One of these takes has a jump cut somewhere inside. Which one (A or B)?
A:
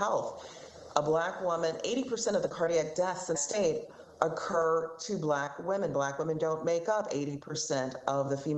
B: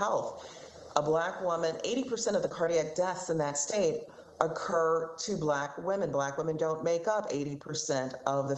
A